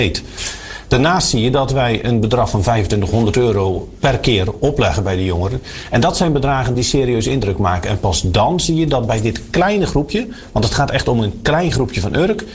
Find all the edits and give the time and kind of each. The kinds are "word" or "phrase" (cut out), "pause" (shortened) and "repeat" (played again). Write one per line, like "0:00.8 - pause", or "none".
none